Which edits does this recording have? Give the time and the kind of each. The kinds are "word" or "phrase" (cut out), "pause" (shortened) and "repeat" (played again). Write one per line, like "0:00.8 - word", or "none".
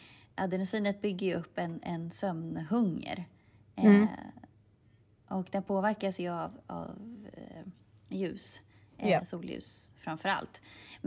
none